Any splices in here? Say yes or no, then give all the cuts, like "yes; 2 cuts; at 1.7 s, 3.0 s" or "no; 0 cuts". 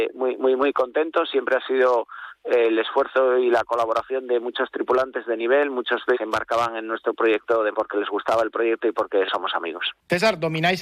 yes; 2 cuts; at 6.1 s, 7.7 s